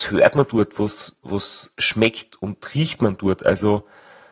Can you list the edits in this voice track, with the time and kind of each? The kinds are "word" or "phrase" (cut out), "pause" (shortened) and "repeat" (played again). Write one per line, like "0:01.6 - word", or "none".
none